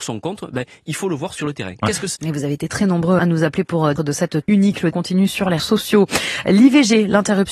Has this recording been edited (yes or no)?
yes